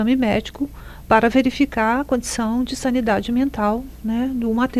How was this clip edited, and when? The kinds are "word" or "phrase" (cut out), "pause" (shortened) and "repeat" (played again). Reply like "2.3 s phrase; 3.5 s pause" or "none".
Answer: none